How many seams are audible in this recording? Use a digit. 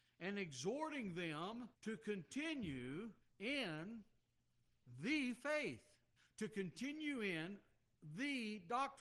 3